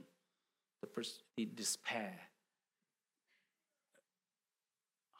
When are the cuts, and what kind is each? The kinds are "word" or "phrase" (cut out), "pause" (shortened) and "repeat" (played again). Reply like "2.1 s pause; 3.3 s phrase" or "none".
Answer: 1.3 s pause